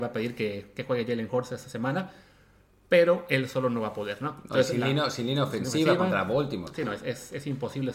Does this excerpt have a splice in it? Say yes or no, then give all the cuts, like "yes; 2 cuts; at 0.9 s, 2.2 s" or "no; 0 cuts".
no; 0 cuts